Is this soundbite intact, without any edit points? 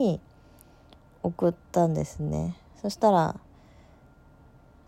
no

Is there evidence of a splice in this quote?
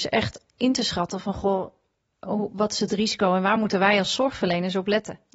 no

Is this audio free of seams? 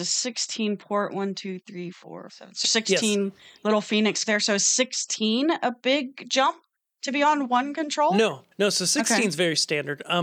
no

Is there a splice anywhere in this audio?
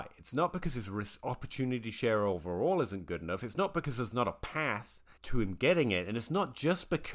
yes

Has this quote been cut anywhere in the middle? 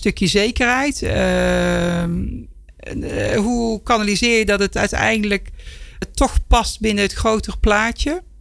yes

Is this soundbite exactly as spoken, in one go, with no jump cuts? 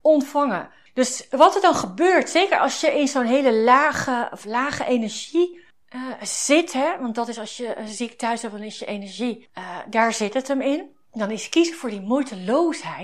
yes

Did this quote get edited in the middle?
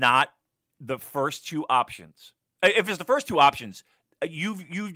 no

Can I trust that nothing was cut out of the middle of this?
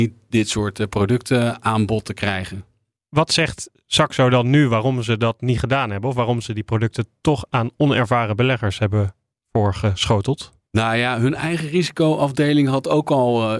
yes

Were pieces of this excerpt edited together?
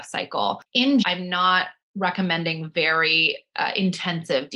yes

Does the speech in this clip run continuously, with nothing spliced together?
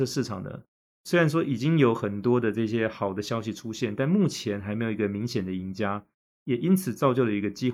yes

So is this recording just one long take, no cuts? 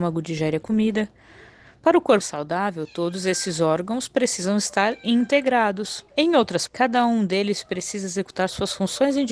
no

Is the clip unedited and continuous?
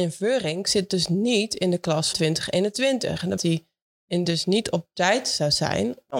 no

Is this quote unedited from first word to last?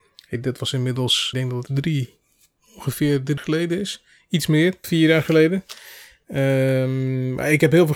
no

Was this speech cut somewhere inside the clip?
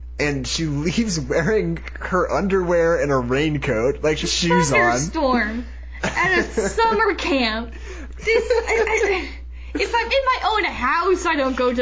yes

